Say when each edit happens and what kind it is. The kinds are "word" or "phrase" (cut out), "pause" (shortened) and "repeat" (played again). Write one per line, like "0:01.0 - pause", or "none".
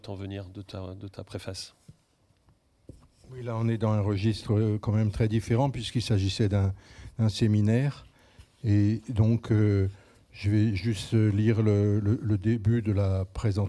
none